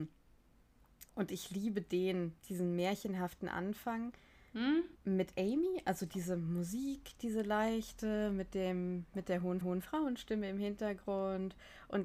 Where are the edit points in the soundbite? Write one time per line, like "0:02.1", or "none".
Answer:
0:01.1
0:02.4
0:04.9
0:09.6